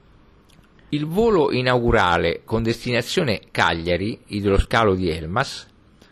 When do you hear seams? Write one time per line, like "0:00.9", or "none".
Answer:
none